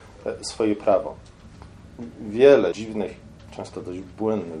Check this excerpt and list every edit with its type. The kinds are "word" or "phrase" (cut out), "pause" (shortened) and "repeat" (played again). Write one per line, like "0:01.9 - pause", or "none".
0:02.7 - word